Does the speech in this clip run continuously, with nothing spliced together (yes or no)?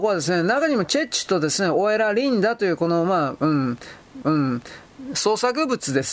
no